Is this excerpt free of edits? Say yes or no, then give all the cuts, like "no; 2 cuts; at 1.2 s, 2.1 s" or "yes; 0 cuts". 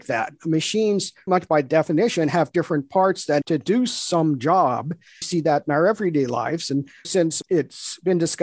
no; 4 cuts; at 1.3 s, 3.4 s, 5.2 s, 7.0 s